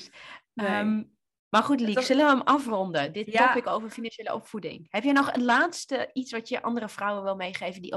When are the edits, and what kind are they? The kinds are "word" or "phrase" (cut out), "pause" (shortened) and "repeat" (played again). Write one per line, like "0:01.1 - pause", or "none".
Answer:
none